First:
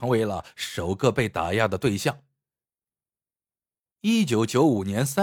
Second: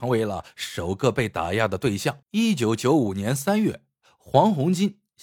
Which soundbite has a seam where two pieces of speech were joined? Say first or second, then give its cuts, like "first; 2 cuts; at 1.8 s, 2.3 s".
second; 1 cut; at 2.2 s